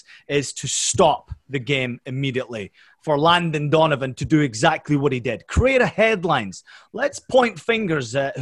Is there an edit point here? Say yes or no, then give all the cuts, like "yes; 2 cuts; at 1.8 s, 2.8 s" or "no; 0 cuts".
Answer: no; 0 cuts